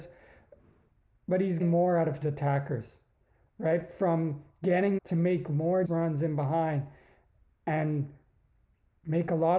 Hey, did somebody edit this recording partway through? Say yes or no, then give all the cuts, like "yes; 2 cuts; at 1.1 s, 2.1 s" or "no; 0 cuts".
yes; 4 cuts; at 1.6 s, 2.2 s, 5.0 s, 5.8 s